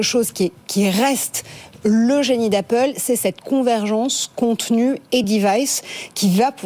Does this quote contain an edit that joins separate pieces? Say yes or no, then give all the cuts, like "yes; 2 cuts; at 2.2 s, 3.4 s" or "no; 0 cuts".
no; 0 cuts